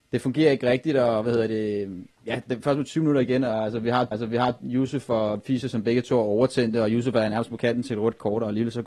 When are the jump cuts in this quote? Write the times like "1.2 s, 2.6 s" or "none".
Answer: 2.1 s, 4.1 s